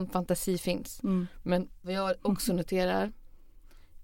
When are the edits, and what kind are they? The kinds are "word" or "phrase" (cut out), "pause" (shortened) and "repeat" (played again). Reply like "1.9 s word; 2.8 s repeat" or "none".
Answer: none